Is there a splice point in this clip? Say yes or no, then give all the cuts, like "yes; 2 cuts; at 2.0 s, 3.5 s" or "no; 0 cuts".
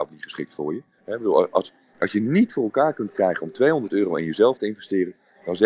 yes; 1 cut; at 0.9 s